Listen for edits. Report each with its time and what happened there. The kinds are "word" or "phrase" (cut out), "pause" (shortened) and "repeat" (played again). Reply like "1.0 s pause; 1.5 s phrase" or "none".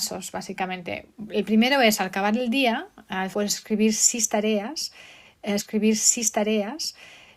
3.3 s phrase; 5.6 s repeat